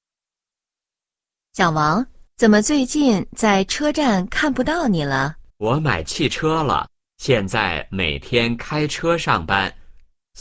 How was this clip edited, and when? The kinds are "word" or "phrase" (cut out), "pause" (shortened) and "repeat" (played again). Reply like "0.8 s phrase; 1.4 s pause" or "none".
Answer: 2.3 s pause; 5.5 s pause; 7.0 s pause